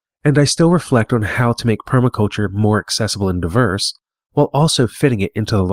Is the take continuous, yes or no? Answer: yes